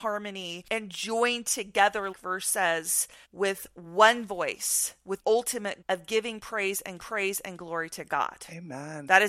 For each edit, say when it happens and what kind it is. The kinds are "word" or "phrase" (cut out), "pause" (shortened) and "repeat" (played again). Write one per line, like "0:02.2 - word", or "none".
0:02.1 - word
0:03.2 - pause
0:05.2 - word
0:05.8 - word
0:07.0 - repeat